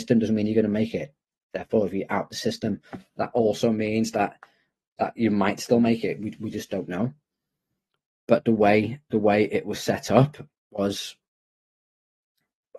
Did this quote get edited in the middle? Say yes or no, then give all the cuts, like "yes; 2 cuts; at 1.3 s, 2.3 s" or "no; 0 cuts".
no; 0 cuts